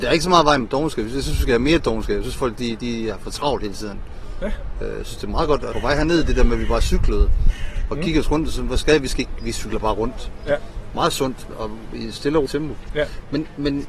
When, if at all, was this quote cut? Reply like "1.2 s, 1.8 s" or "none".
2.8 s, 5.7 s, 11.5 s, 12.5 s

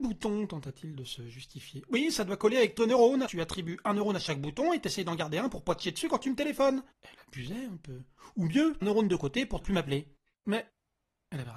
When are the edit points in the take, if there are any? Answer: 2.8 s, 3.3 s, 6.9 s, 8.8 s, 9.6 s, 10.3 s

